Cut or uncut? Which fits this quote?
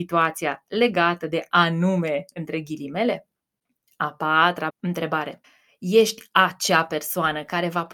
uncut